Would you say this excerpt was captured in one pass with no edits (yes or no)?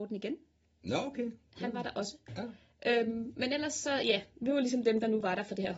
yes